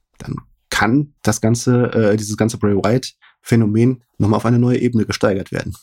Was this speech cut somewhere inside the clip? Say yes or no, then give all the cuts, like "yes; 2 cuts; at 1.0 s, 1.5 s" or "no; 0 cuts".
yes; 2 cuts; at 1.2 s, 4.1 s